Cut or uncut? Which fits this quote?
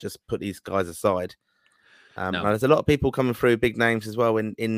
uncut